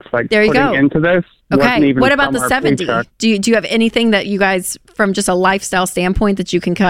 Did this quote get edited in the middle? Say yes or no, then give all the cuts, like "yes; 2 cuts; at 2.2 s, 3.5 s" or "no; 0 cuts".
no; 0 cuts